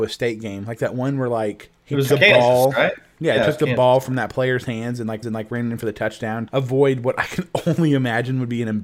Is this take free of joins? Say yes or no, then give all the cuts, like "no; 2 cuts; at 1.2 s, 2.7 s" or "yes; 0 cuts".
no; 4 cuts; at 1.8 s, 2.1 s, 5.2 s, 6.5 s